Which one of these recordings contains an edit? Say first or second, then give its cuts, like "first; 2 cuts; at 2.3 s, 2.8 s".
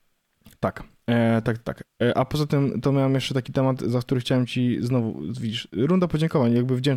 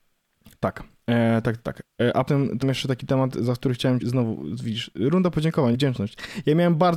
second; 4 cuts; at 2.3 s, 2.6 s, 4.0 s, 5.7 s